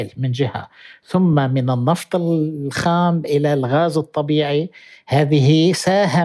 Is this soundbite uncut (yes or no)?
yes